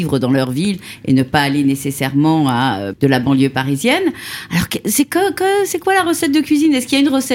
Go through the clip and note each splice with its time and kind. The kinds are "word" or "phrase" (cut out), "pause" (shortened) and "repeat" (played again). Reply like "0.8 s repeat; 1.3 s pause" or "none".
2.9 s phrase